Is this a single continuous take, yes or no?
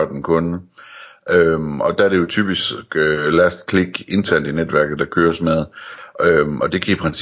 yes